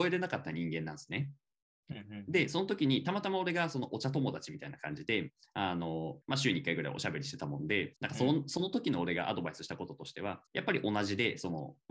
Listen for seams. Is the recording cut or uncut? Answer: cut